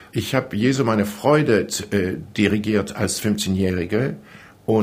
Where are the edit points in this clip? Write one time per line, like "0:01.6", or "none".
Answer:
none